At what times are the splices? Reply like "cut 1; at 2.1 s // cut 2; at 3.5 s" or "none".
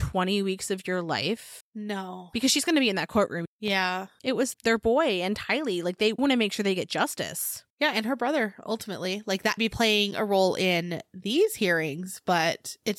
cut 1; at 4.5 s // cut 2; at 6.2 s // cut 3; at 7.7 s // cut 4; at 9.6 s

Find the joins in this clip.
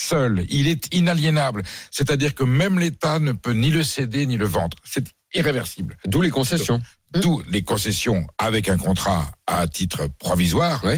cut 1; at 8.3 s

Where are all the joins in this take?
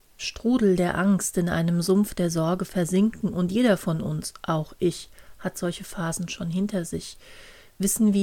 none

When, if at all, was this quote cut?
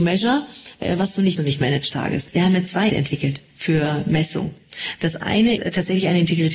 cut 1; at 1.4 s // cut 2; at 1.9 s // cut 3; at 2.9 s // cut 4; at 3.5 s // cut 5; at 5.6 s

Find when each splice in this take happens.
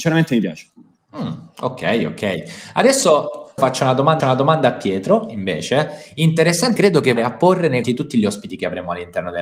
cut 1; at 3.6 s // cut 2; at 4.2 s // cut 3; at 6.8 s // cut 4; at 7.2 s // cut 5; at 7.8 s

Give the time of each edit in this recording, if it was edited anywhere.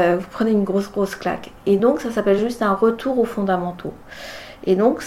none

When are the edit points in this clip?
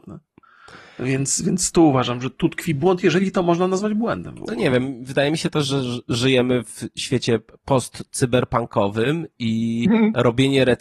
none

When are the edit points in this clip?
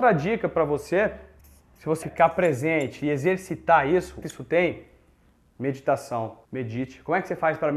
cut 1; at 1.4 s // cut 2; at 2.0 s // cut 3; at 4.2 s // cut 4; at 6.4 s

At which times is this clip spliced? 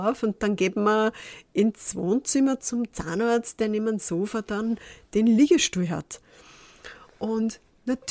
none

